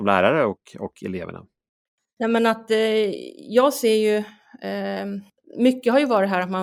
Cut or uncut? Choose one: uncut